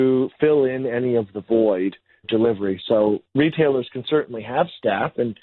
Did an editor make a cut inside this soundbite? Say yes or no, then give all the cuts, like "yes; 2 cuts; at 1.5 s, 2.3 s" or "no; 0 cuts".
yes; 2 cuts; at 2.2 s, 3.3 s